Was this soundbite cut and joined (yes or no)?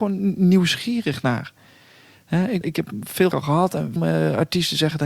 yes